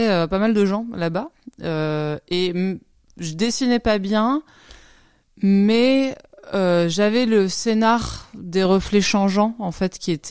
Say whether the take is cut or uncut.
uncut